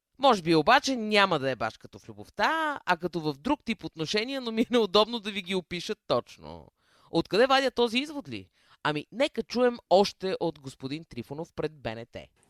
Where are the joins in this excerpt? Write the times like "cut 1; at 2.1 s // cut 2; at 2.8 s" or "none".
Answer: none